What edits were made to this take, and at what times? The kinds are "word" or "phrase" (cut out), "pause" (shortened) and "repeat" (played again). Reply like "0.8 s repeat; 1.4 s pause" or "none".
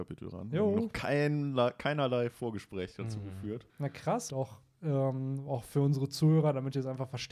3.7 s pause; 4.3 s word

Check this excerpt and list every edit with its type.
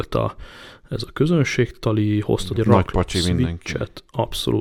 2.6 s word

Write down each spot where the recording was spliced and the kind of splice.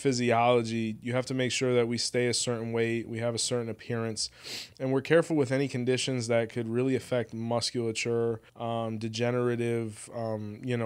8.5 s pause

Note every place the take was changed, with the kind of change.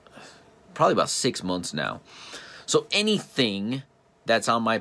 none

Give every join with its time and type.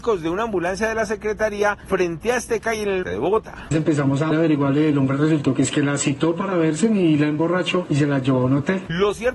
3.0 s word; 4.3 s word

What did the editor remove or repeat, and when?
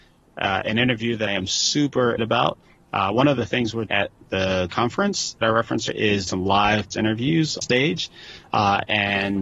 1.3 s word; 2.2 s word; 3.9 s word; 4.7 s word; 5.4 s word; 5.9 s word; 6.3 s word; 6.9 s word; 7.6 s word

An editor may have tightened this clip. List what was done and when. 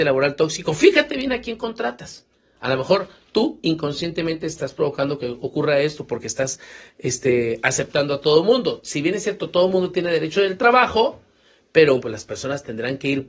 12.0 s word

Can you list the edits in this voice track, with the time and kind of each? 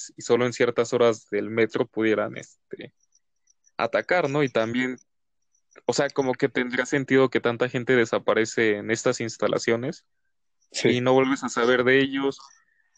none

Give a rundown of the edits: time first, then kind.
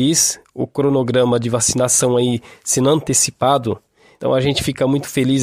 none

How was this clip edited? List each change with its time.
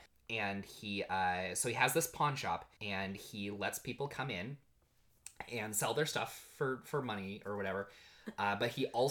2.8 s pause

